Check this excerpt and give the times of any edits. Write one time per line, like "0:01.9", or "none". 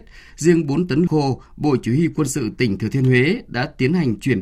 0:01.1